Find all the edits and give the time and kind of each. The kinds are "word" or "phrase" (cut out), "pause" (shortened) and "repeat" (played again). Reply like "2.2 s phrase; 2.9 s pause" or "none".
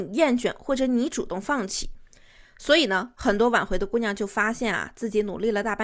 none

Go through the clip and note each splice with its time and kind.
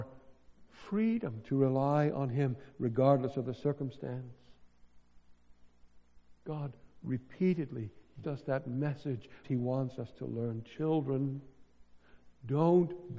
8.2 s word; 9.4 s word

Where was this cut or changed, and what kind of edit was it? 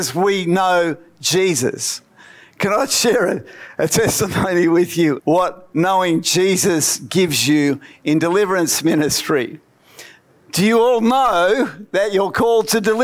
5.2 s word

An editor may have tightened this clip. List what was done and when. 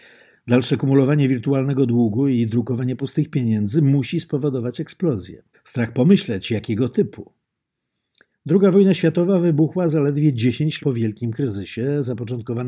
5.5 s pause; 10.8 s word

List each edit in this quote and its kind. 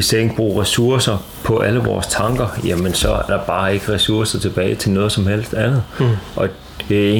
3.3 s word

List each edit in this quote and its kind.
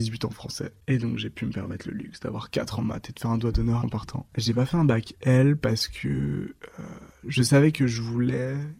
3.8 s phrase; 4.3 s pause

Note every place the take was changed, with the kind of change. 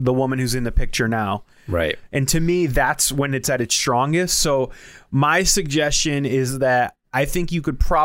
none

